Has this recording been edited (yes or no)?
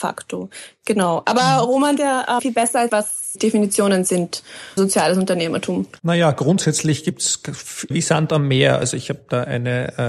yes